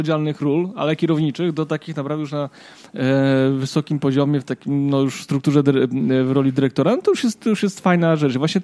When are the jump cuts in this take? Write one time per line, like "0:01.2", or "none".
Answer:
none